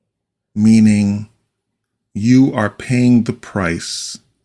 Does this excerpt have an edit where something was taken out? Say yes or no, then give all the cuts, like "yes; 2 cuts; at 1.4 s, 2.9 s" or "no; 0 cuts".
no; 0 cuts